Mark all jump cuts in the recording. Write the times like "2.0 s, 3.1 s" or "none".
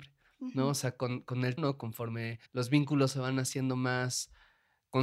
1.6 s, 2.5 s

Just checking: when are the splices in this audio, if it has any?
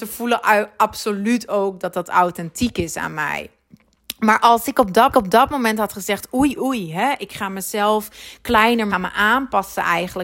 5.1 s, 6.6 s, 8.9 s

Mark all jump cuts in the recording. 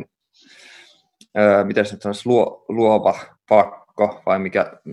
3.3 s

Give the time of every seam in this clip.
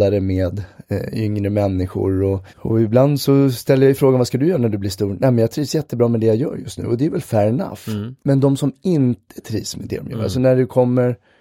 2.5 s, 8.2 s

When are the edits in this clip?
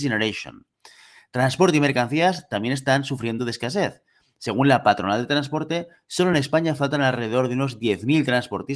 none

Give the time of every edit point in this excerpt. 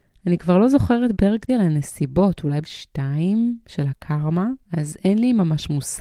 1.1 s, 1.5 s, 2.6 s, 4.6 s

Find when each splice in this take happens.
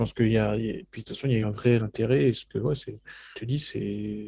1.4 s, 1.8 s, 2.5 s, 3.3 s

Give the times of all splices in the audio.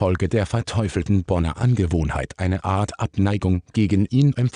none

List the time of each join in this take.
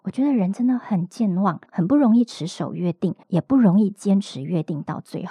1.7 s, 3.2 s

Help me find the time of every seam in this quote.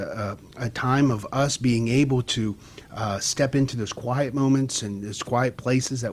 none

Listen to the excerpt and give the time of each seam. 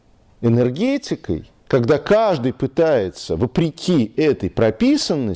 1.6 s

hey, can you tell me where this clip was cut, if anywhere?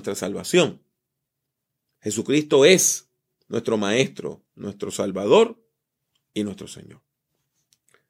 none

